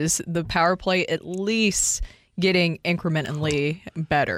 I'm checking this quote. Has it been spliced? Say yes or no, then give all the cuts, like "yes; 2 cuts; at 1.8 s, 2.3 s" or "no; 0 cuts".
no; 0 cuts